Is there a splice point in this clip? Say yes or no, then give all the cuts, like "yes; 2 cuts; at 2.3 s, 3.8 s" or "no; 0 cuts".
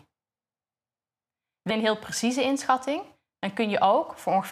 yes; 1 cut; at 1.7 s